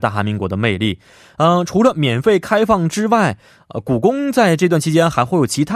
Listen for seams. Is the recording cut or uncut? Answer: uncut